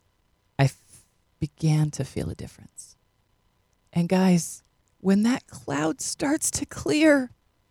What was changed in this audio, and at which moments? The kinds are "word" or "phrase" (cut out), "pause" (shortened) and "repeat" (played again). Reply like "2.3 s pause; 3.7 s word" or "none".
none